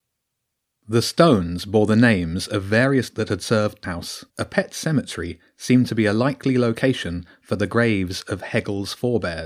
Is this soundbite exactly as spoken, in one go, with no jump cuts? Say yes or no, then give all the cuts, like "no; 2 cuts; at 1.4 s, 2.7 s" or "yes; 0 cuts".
no; 3 cuts; at 3.1 s, 3.8 s, 4.3 s